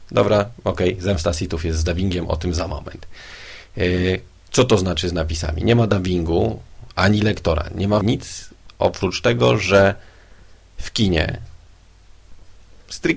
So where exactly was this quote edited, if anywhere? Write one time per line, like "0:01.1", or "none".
0:08.0